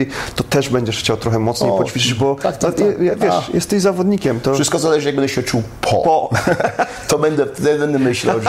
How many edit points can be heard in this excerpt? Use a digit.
0